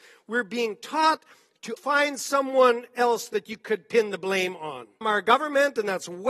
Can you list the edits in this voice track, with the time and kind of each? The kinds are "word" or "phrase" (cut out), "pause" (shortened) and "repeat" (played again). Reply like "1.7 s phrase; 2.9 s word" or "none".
1.8 s word; 5.0 s word